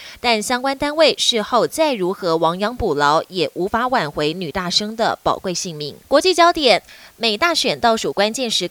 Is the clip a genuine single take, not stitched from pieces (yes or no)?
no